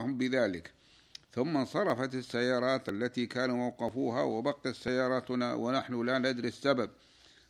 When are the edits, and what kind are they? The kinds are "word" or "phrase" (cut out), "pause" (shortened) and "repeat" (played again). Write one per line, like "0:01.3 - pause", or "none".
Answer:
none